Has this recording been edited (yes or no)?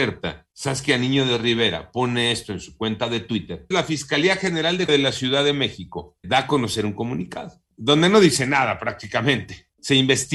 yes